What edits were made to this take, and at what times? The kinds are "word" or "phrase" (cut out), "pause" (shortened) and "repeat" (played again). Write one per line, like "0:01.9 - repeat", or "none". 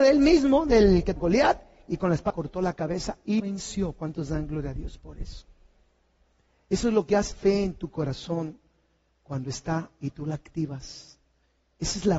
0:01.2 - word
0:02.3 - word
0:03.4 - word
0:07.3 - word